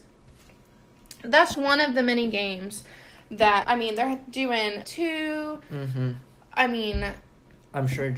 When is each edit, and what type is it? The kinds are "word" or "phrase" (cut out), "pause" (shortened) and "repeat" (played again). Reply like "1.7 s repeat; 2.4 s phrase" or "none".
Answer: 1.5 s word; 3.6 s word; 4.8 s word